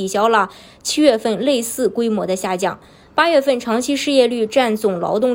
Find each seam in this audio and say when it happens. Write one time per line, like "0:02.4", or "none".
none